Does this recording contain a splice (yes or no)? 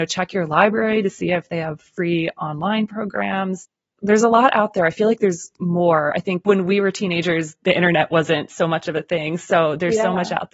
no